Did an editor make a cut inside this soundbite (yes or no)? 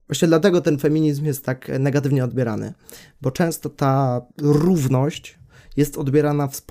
yes